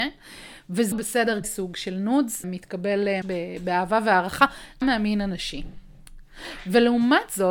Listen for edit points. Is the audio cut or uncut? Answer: cut